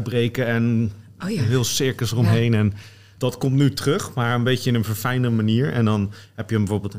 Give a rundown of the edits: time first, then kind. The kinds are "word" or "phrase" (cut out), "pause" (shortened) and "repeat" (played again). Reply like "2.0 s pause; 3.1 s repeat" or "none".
3.2 s word